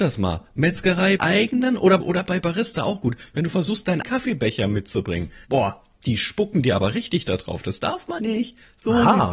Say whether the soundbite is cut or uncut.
cut